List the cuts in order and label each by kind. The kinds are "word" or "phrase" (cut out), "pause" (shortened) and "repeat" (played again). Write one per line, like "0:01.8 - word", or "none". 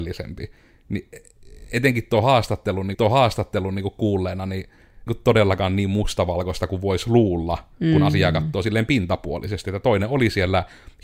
0:02.9 - repeat
0:05.1 - phrase